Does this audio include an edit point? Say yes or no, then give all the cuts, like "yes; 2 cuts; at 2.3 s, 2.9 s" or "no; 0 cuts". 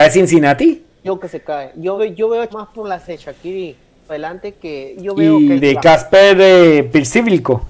yes; 7 cuts; at 1.2 s, 2.0 s, 2.5 s, 3.1 s, 4.1 s, 5.0 s, 5.6 s